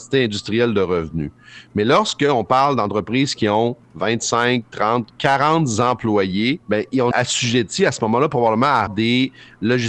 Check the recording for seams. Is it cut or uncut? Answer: cut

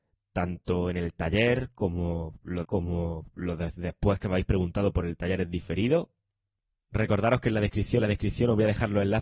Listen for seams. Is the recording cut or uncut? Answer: cut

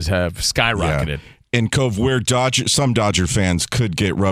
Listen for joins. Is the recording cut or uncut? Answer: uncut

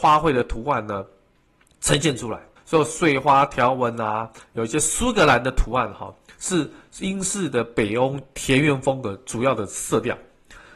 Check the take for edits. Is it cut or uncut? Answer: cut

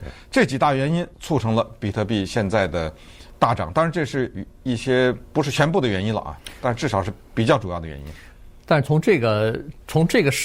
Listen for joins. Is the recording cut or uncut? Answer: cut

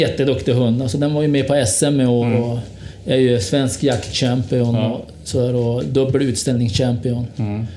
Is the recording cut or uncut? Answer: uncut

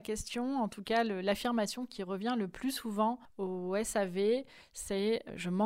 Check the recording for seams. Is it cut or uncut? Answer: uncut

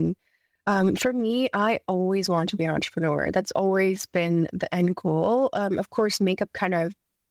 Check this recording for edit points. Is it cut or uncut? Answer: uncut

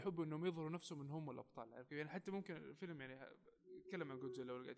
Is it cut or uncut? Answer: uncut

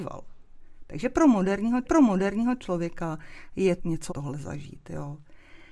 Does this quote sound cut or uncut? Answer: cut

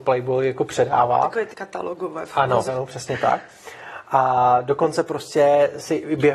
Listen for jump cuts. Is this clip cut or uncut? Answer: cut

